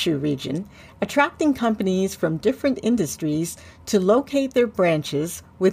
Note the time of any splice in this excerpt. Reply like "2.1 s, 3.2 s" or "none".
none